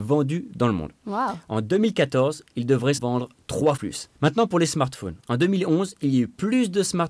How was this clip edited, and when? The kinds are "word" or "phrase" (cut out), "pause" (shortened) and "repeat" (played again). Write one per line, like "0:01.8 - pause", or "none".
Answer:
0:03.0 - word
0:03.8 - word
0:04.1 - pause
0:05.2 - pause